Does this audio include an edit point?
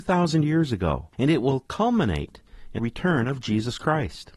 yes; 2 cuts; at 1.1 s, 2.8 s

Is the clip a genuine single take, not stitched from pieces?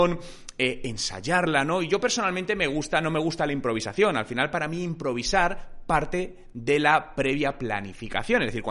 yes; 0 cuts

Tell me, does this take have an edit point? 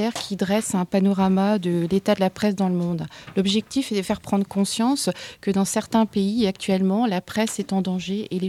yes; 1 cut; at 4.0 s

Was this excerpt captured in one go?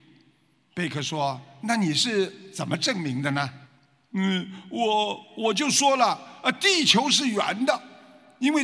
no; 1 cut; at 3.7 s

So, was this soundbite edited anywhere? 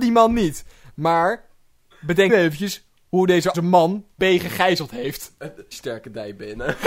yes; 4 cuts; at 2.3 s, 3.5 s, 4.2 s, 5.7 s

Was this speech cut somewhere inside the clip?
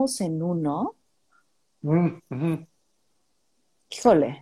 no; 0 cuts

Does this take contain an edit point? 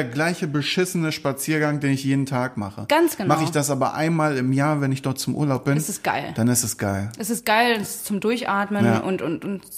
no; 0 cuts

